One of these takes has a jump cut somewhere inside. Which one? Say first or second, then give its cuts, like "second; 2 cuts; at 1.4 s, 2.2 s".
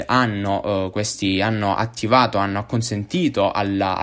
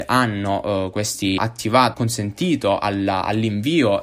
second; 2 cuts; at 1.4 s, 1.9 s